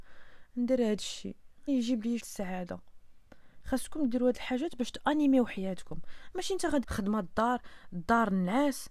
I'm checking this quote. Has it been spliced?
yes; 3 cuts; at 1.7 s, 2.2 s, 6.8 s

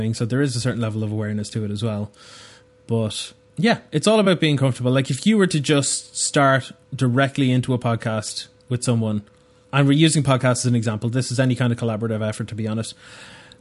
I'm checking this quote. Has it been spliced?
no; 0 cuts

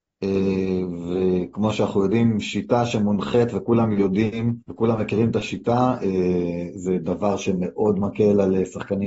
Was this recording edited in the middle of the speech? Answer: yes; 1 cut; at 4.6 s

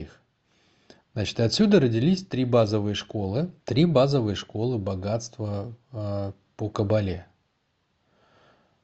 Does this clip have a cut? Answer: yes; 2 cuts; at 3.6 s, 5.8 s

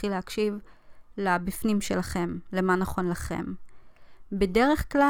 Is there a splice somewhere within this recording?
no; 0 cuts

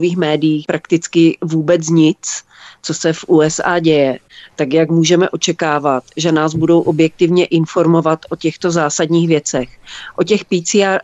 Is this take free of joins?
yes; 0 cuts

